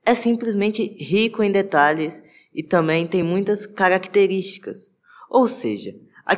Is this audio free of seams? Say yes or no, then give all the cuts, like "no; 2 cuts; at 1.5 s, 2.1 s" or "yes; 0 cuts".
yes; 0 cuts